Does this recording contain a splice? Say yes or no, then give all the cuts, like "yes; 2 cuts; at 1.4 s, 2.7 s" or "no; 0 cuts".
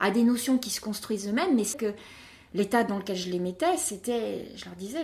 yes; 1 cut; at 1.7 s